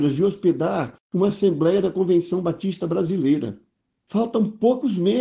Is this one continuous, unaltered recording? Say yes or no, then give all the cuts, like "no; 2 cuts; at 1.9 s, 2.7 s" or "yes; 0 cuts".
yes; 0 cuts